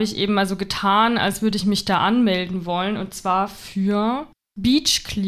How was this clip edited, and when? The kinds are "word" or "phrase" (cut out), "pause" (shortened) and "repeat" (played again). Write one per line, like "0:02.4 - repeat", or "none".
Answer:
none